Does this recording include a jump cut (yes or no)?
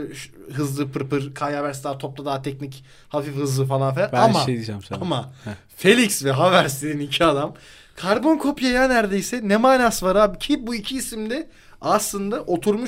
no